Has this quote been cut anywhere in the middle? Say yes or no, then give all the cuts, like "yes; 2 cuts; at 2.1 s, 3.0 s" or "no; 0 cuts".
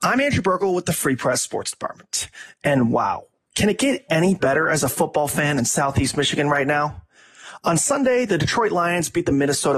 no; 0 cuts